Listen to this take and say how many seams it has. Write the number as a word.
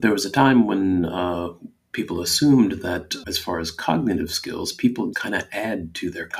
two